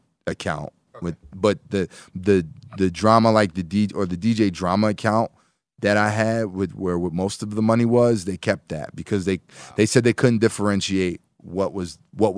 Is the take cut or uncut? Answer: uncut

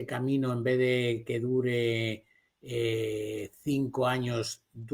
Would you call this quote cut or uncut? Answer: uncut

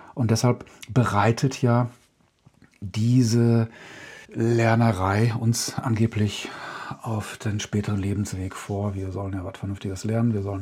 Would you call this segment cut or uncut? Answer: cut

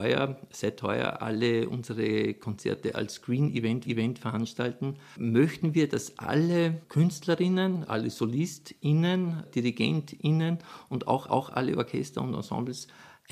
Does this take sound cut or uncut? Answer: cut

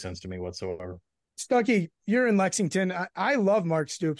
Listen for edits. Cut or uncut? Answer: uncut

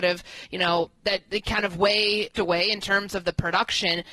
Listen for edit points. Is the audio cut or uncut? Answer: cut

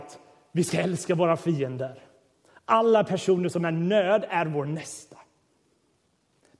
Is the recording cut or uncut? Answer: uncut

